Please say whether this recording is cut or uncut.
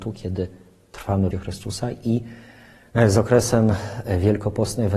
cut